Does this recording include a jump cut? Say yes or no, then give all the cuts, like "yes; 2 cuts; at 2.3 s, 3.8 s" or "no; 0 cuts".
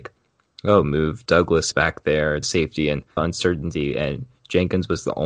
yes; 3 cuts; at 1.7 s, 2.4 s, 3.2 s